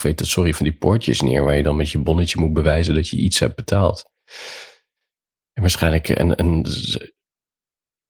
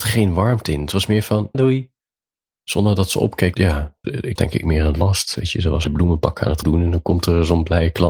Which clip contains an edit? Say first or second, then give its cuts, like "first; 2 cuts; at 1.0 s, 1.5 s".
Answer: second; 6 cuts; at 1.5 s, 3.5 s, 4.0 s, 4.4 s, 5.8 s, 6.6 s